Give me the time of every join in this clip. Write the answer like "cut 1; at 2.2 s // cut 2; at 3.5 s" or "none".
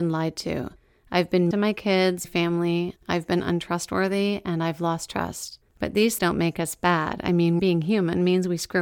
cut 1; at 1.5 s // cut 2; at 2.2 s // cut 3; at 5.7 s // cut 4; at 6.2 s // cut 5; at 7.6 s

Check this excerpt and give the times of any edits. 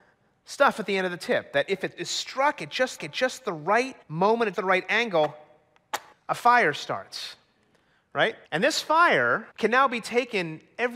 cut 1; at 2.0 s // cut 2; at 3.0 s // cut 3; at 4.0 s // cut 4; at 4.5 s // cut 5; at 6.1 s // cut 6; at 8.4 s // cut 7; at 9.5 s

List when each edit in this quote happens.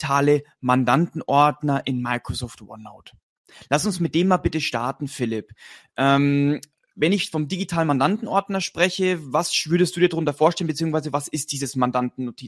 none

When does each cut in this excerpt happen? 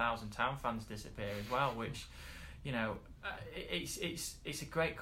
none

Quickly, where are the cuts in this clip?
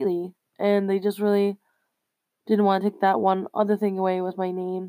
none

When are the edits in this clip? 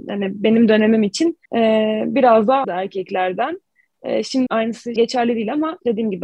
cut 1; at 1.5 s // cut 2; at 2.6 s // cut 3; at 4.5 s // cut 4; at 5.0 s

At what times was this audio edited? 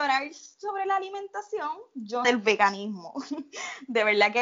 cut 1; at 2.2 s

